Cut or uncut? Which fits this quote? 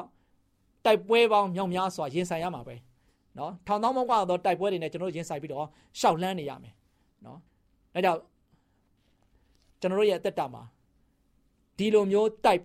cut